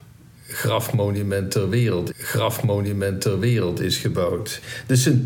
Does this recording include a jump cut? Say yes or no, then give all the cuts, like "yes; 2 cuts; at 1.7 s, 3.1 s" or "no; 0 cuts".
yes; 1 cut; at 2.1 s